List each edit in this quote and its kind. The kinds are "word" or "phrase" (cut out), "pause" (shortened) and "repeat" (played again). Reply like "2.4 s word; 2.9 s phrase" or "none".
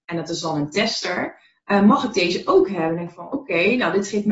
none